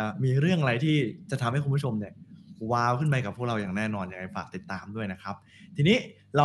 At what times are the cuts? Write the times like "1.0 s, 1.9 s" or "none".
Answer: none